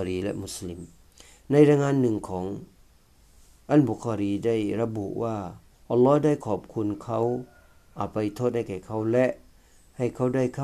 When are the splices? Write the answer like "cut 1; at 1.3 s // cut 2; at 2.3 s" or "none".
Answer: cut 1; at 5.7 s